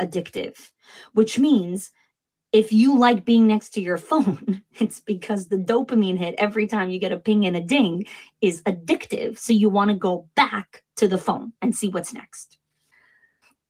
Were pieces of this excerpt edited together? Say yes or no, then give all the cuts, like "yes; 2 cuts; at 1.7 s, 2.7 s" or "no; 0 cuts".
no; 0 cuts